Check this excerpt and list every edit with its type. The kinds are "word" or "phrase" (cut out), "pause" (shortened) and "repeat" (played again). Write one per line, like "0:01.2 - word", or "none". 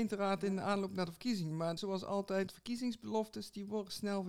0:01.8 - word
0:02.5 - word

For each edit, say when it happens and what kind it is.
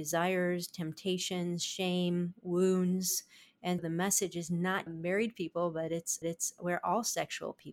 0:03.8 - word
0:04.9 - phrase
0:06.2 - repeat

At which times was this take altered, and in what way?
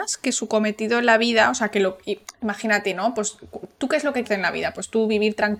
0:04.2 - word

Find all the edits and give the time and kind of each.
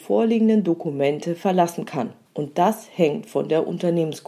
0:02.3 - pause

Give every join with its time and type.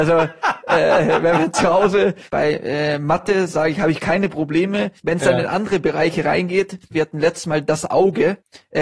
0:02.3 - pause
0:05.0 - pause
0:06.9 - pause

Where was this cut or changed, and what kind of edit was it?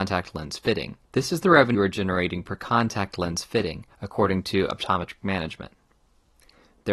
0:01.0 - pause
0:01.7 - word
0:03.9 - pause

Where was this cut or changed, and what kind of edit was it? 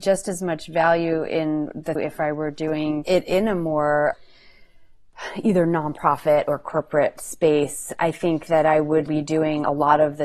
0:02.0 - phrase
0:09.1 - word

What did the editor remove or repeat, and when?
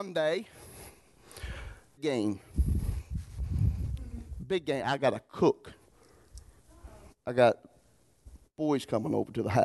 0:02.0 - word

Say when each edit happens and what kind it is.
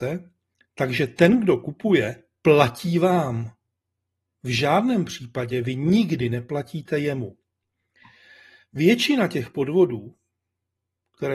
none

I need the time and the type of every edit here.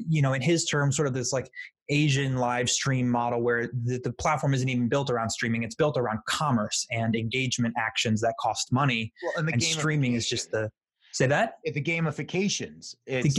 none

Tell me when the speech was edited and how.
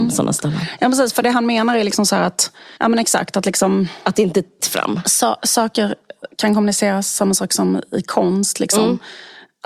0:02.8 - pause
0:04.6 - word

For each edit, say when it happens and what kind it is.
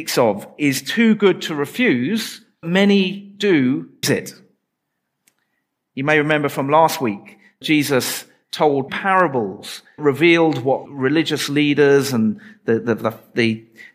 0:02.6 - word
0:04.0 - word
0:07.6 - word
0:08.9 - word
0:10.0 - word
0:10.9 - word

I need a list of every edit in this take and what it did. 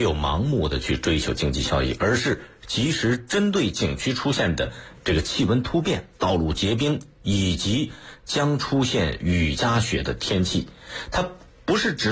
0:06.1 - pause

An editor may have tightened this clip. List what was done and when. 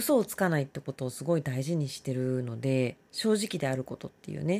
0:03.0 - pause

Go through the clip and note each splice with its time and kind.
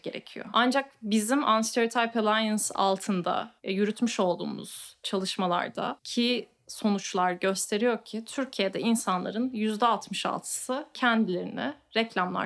0:03.6 - pause

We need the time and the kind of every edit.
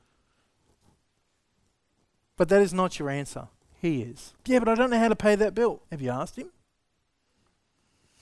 0:03.6 - pause
0:04.4 - pause
0:05.8 - pause

